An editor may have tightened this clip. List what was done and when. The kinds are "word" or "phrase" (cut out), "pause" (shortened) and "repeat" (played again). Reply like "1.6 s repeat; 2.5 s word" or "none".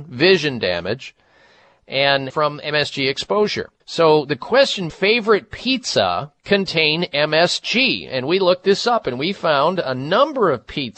2.3 s word; 3.8 s pause; 4.9 s phrase; 6.4 s pause